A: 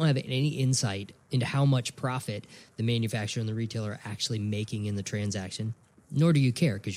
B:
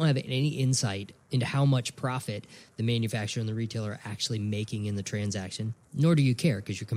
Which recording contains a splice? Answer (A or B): B